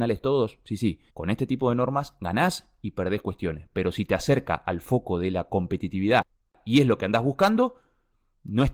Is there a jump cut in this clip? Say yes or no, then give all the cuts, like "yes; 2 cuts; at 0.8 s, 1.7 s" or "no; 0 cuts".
yes; 1 cut; at 1.1 s